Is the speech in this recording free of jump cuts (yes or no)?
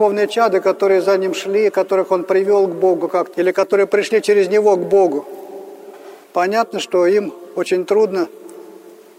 no